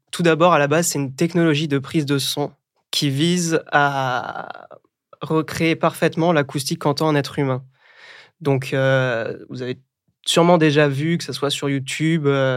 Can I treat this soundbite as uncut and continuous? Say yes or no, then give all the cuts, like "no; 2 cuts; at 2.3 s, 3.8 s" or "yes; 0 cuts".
yes; 0 cuts